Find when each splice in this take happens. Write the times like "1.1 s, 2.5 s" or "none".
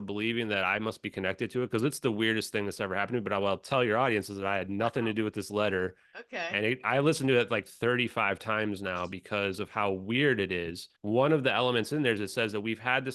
11.0 s